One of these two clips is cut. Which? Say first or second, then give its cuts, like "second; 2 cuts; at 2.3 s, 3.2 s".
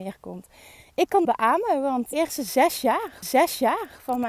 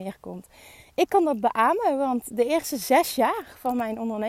first; 3 cuts; at 1.2 s, 2.1 s, 3.2 s